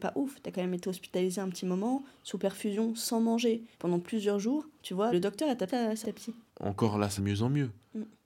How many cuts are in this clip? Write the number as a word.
seven